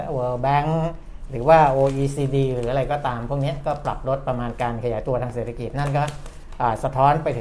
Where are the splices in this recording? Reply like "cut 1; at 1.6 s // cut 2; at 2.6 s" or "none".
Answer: none